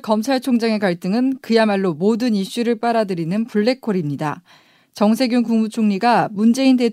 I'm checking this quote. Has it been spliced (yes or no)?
no